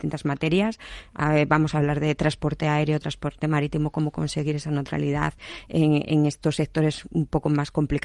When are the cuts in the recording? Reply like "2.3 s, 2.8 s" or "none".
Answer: none